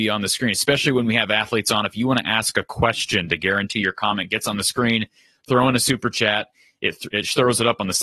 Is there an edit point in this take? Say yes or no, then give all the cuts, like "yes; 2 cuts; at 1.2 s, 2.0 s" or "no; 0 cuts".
no; 0 cuts